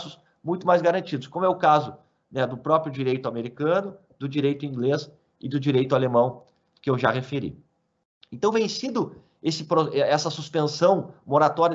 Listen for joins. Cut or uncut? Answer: uncut